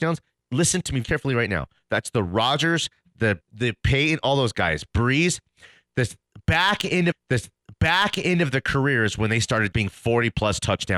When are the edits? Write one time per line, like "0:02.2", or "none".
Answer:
0:01.0
0:03.4
0:07.1
0:09.7